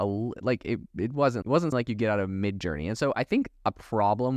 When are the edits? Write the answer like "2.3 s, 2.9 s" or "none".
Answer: 1.4 s, 1.7 s